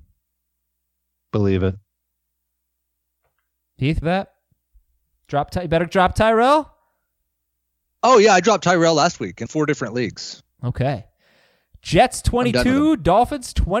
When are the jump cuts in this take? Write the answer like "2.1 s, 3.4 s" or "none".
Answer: 4.0 s, 9.5 s

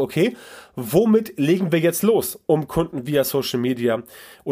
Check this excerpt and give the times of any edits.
none

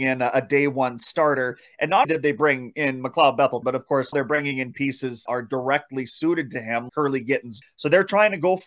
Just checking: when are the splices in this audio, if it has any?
2.0 s, 3.6 s, 4.1 s, 5.3 s, 6.9 s, 7.6 s

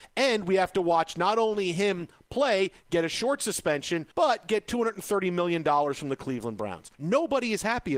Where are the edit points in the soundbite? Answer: 4.1 s, 6.9 s

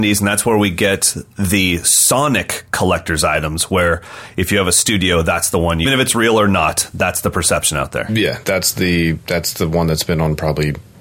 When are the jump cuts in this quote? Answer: 5.8 s

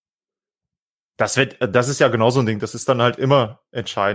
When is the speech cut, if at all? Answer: none

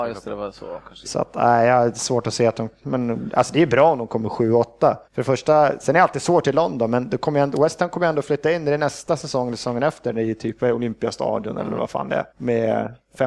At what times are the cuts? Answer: 5.0 s, 12.3 s

